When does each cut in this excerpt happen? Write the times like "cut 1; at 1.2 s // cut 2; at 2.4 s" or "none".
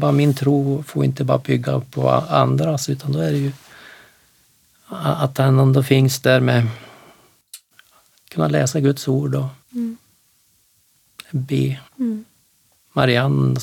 cut 1; at 9.6 s // cut 2; at 11.9 s